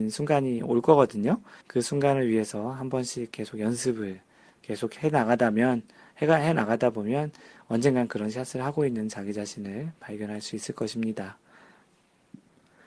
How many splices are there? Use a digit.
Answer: 1